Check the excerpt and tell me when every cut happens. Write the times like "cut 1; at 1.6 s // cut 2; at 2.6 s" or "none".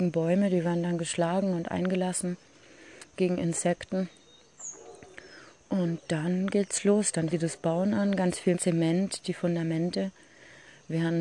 cut 1; at 7.3 s // cut 2; at 8.5 s